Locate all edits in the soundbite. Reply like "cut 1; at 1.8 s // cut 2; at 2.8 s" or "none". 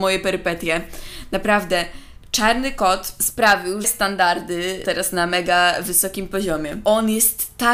cut 1; at 3.8 s // cut 2; at 4.8 s